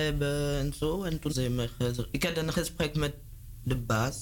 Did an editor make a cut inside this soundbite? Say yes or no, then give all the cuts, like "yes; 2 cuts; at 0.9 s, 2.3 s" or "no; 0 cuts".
yes; 2 cuts; at 1.3 s, 2.1 s